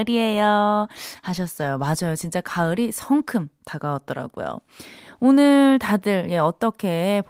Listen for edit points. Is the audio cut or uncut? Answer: uncut